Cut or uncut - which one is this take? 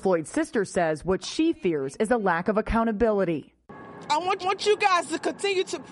cut